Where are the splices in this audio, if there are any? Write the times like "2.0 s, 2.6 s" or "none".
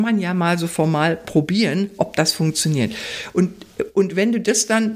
none